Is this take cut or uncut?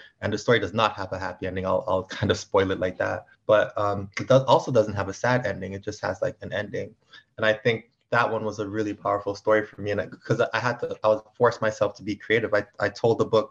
cut